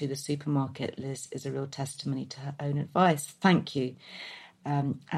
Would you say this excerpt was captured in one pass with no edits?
yes; 0 cuts

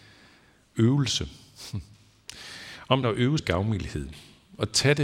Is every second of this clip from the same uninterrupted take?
no; 2 cuts; at 3.0 s, 3.4 s

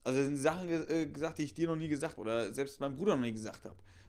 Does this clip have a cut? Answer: yes; 1 cut; at 2.2 s

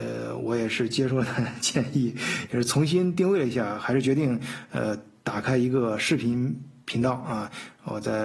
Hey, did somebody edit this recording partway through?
no; 0 cuts

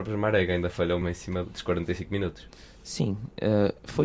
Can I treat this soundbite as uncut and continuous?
no; 2 cuts; at 1.0 s, 1.4 s

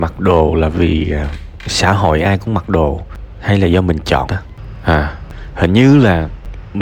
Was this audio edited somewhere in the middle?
yes; 1 cut; at 4.3 s

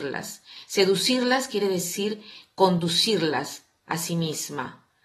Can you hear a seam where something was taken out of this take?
no; 0 cuts

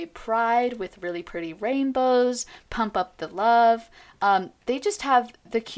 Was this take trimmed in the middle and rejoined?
no; 0 cuts

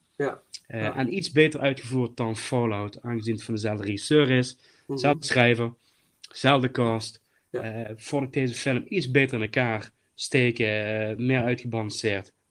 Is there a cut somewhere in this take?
no; 0 cuts

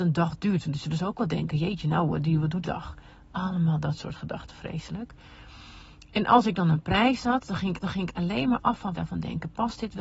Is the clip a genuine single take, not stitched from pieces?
no; 3 cuts; at 2.6 s, 7.8 s, 8.9 s

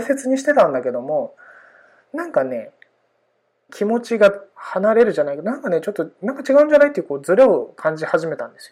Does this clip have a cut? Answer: yes; 2 cuts; at 3.7 s, 4.5 s

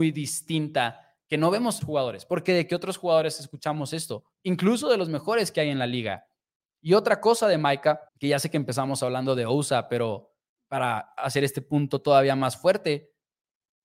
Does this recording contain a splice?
yes; 4 cuts; at 1.8 s, 4.3 s, 8.1 s, 10.5 s

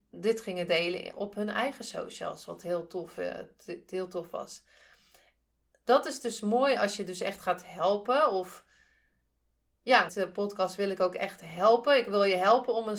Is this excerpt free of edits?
no; 1 cut; at 10.1 s

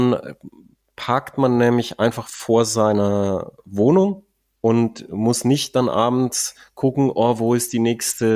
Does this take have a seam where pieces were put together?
no; 0 cuts

